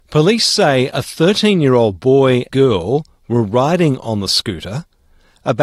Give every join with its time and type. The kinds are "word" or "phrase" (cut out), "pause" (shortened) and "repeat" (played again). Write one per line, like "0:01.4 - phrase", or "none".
0:02.5 - word